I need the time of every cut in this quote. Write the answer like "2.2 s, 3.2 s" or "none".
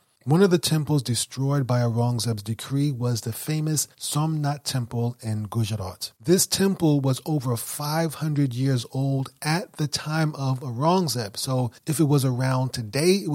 3.9 s, 6.1 s, 11.8 s